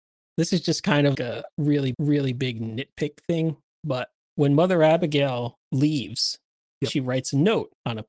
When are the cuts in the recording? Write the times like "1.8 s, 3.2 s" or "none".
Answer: 1.1 s, 1.9 s